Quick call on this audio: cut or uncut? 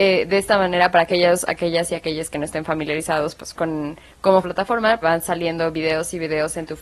cut